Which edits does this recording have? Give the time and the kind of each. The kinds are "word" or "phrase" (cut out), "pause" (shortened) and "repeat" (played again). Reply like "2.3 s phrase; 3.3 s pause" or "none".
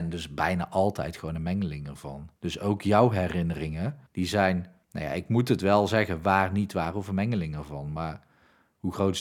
2.4 s pause; 4.1 s pause; 4.8 s pause